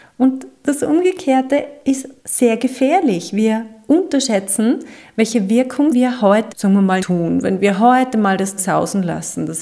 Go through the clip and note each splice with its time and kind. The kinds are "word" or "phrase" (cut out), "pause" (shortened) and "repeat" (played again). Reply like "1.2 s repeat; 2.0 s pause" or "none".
2.2 s pause; 5.9 s phrase; 6.5 s word; 7.0 s word; 8.6 s word